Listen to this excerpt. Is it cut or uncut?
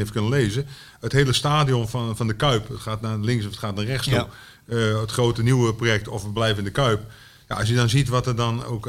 uncut